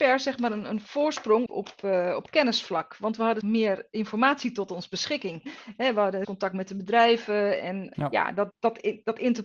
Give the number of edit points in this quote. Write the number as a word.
five